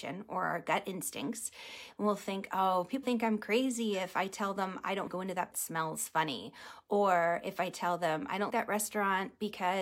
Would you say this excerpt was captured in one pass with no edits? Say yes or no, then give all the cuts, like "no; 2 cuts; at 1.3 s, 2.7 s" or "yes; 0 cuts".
no; 4 cuts; at 3.0 s, 5.1 s, 5.5 s, 8.5 s